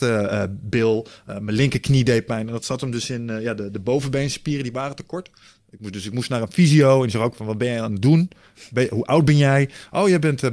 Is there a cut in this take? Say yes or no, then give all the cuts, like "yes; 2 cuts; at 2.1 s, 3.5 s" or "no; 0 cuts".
no; 0 cuts